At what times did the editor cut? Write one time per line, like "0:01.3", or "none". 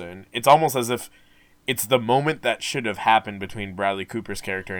none